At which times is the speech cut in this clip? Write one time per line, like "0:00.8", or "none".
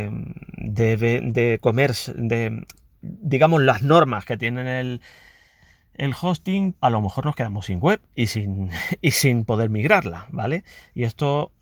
0:06.7